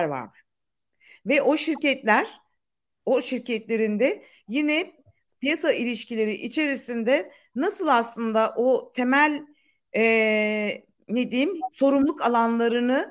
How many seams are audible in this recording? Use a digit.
0